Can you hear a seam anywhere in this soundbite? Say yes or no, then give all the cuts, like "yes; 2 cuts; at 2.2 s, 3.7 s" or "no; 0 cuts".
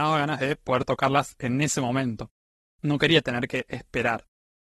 no; 0 cuts